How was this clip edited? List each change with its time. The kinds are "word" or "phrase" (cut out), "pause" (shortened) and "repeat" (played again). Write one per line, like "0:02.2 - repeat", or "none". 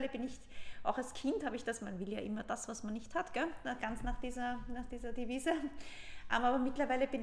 none

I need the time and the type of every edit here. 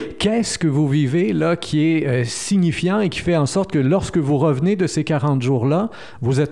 none

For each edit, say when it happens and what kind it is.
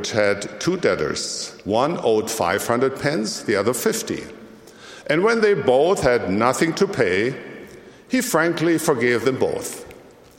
0:01.6 - pause

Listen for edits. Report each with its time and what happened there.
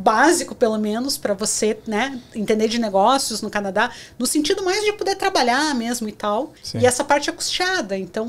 0:06.6 - pause

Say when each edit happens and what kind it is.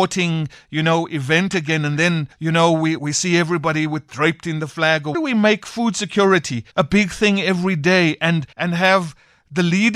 0:02.3 - pause
0:03.0 - word
0:05.1 - phrase
0:06.7 - pause
0:08.5 - pause

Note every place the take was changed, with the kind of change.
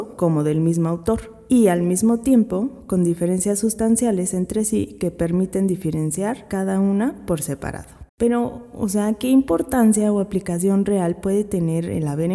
0:08.1 - pause

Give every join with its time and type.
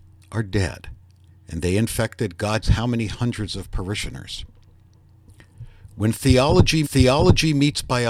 0:01.3 - pause
0:02.6 - word
0:06.8 - repeat

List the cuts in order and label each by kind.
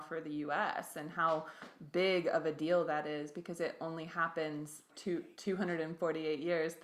0:04.9 - word

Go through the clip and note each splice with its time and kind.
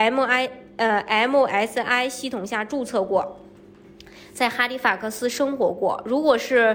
none

